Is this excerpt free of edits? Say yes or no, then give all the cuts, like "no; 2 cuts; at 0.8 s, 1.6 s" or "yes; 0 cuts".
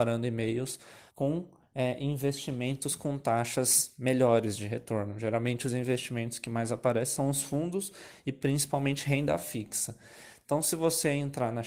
no; 1 cut; at 1.1 s